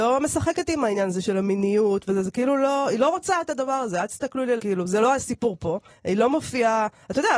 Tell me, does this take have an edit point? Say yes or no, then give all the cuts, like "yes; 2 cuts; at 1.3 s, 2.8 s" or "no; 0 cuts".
yes; 2 cuts; at 4.6 s, 5.9 s